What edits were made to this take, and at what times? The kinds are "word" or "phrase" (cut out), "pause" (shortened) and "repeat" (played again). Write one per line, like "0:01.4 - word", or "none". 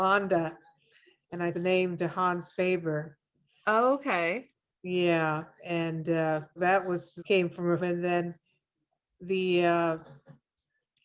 0:01.5 - word
0:06.6 - word
0:07.2 - word
0:07.8 - word